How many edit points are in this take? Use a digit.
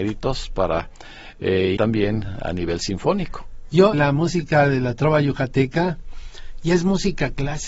2